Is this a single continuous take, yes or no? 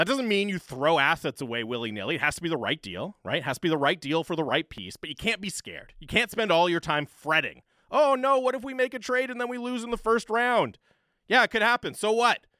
yes